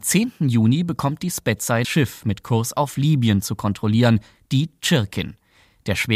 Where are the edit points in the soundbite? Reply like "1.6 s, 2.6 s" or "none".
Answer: 1.8 s